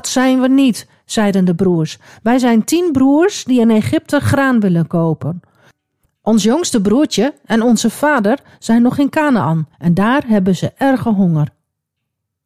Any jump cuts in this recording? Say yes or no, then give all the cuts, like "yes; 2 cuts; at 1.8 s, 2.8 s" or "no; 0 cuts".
yes; 1 cut; at 9.7 s